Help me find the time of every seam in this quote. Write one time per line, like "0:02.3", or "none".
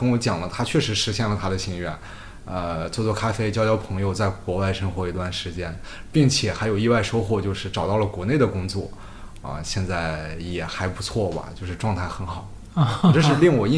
none